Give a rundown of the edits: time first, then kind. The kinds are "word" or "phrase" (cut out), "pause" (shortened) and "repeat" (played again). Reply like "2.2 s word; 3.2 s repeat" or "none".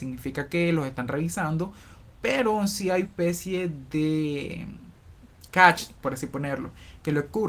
3.0 s word